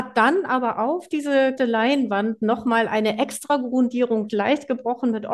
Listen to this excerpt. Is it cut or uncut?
cut